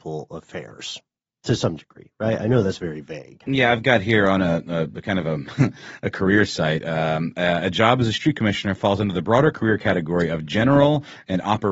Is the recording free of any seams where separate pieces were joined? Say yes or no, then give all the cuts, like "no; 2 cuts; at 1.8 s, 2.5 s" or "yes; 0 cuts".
yes; 0 cuts